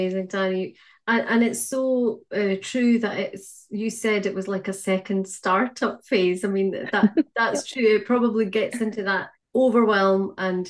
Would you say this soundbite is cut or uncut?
cut